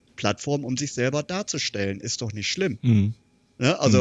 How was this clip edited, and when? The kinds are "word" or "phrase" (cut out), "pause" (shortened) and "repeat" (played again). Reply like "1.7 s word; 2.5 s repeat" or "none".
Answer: none